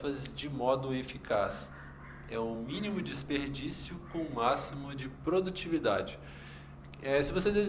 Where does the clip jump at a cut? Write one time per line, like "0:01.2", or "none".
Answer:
none

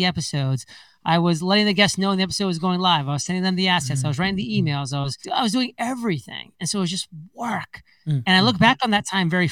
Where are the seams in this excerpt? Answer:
0:05.2

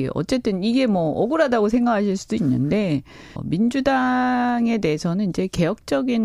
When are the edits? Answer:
0:03.4

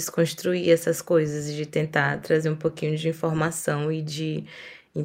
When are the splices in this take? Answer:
none

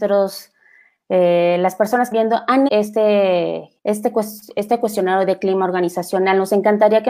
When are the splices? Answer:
0:02.1
0:02.7
0:03.8

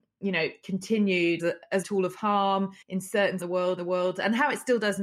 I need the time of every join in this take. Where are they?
0:01.4
0:01.8
0:02.8
0:03.4
0:03.8

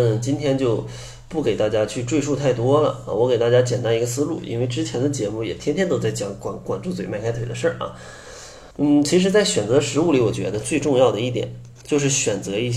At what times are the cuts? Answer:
0:08.7

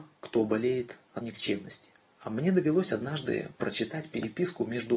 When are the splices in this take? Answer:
0:01.2

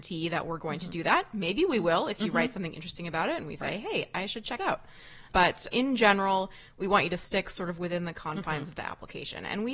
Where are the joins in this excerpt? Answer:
0:04.6
0:05.7

